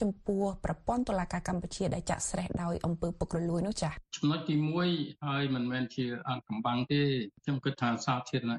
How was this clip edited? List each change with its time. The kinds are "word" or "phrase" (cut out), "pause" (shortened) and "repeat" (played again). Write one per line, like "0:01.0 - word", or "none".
none